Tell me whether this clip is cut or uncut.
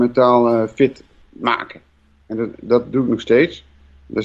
uncut